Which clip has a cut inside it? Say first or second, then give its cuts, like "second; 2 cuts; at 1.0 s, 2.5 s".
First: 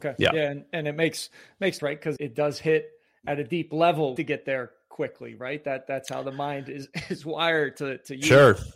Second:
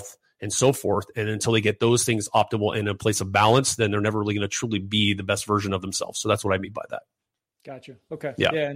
first; 3 cuts; at 1.8 s, 2.2 s, 4.2 s